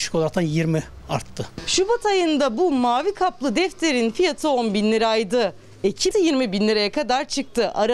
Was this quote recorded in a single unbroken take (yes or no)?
no